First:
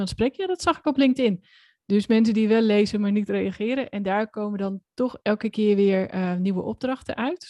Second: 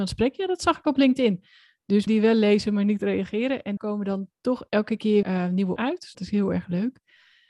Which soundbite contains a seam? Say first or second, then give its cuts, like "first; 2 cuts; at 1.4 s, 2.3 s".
second; 5 cuts; at 2.1 s, 3.8 s, 5.2 s, 5.8 s, 6.1 s